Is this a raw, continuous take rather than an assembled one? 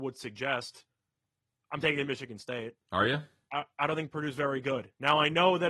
yes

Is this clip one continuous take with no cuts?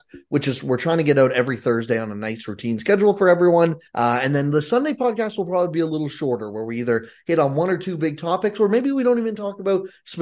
no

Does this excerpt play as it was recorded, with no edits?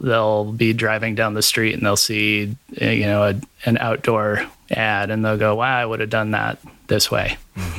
yes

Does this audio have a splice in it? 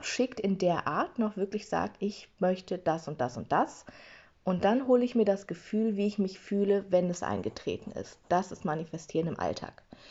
yes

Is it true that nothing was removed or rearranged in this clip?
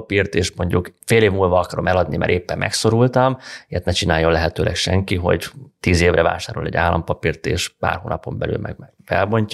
no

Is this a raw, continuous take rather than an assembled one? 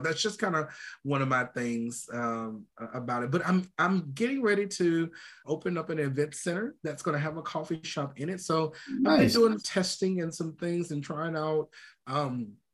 no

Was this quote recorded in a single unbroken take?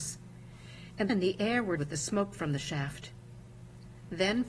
no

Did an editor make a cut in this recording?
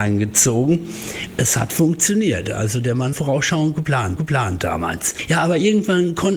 yes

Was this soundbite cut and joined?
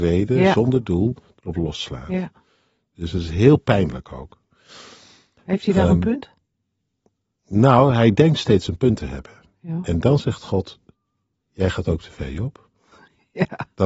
no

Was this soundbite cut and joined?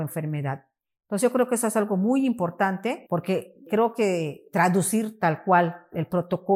no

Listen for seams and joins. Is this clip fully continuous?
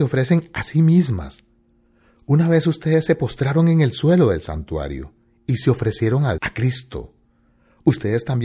no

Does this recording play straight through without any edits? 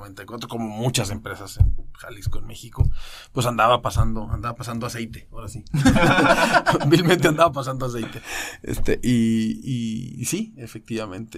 yes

